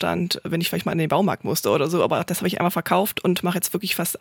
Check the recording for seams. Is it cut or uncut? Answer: uncut